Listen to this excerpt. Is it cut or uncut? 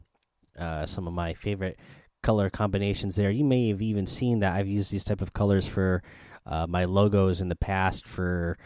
uncut